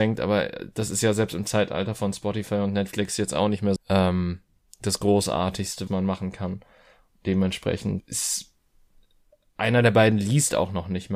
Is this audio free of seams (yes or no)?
no